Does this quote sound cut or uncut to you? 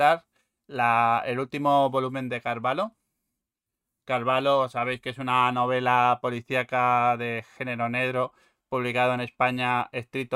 uncut